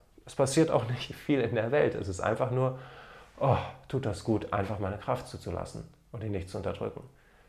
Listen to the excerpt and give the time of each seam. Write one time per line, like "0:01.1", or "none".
none

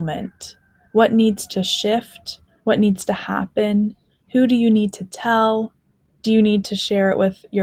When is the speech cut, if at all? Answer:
none

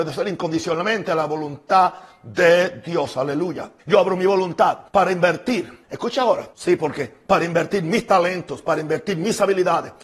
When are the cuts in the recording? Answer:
0:03.8
0:04.9
0:05.8
0:06.5

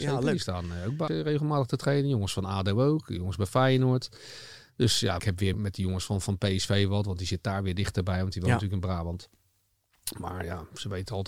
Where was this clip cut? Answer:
0:01.1
0:05.2
0:05.5

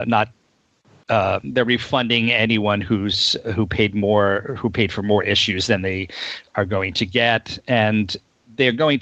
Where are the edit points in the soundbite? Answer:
none

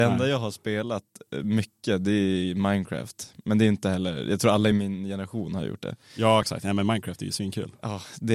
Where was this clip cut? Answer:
none

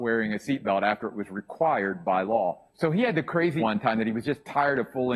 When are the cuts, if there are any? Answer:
0:02.7
0:03.6

